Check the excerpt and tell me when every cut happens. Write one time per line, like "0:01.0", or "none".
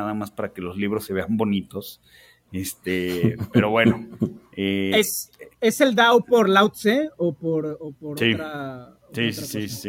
0:04.5

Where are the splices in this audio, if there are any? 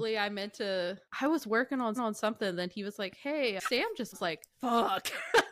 0:01.1
0:02.0
0:04.1
0:04.5

